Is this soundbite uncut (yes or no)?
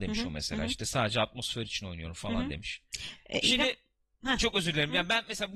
yes